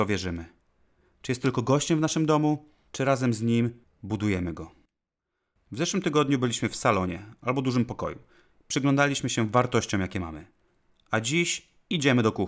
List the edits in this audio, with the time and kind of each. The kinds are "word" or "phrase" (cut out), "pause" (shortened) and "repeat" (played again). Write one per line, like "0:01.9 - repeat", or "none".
none